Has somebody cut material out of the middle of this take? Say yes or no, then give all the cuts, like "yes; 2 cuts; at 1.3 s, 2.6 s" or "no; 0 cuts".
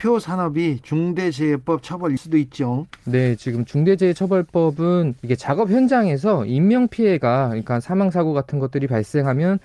yes; 2 cuts; at 2.2 s, 5.2 s